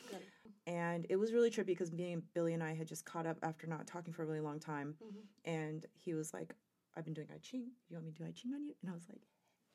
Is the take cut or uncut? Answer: uncut